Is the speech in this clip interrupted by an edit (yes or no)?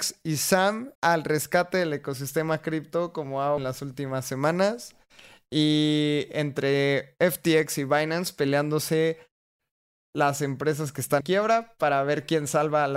yes